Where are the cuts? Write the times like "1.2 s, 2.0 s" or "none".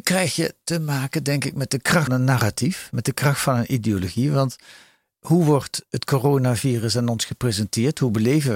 2.1 s